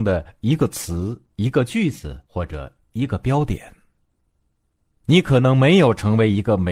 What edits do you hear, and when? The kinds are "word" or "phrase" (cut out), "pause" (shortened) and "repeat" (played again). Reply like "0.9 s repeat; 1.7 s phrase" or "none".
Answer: 2.3 s pause